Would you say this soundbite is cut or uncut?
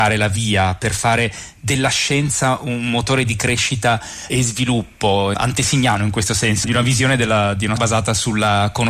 cut